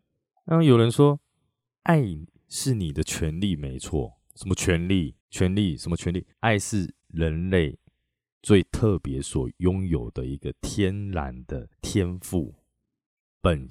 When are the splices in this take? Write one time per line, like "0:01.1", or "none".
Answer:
0:05.2
0:06.3
0:11.7